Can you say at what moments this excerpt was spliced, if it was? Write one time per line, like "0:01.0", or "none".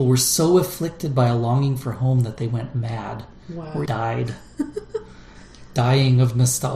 0:03.9